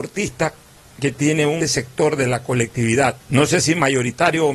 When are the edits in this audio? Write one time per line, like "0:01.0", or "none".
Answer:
0:01.6
0:03.2